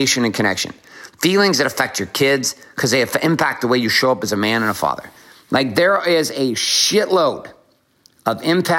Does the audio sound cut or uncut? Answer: uncut